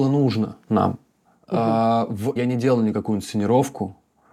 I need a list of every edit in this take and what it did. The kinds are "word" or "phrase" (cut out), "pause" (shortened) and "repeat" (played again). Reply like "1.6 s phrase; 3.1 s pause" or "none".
2.4 s word